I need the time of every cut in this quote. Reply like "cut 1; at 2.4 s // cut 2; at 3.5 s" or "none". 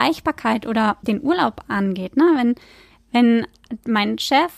none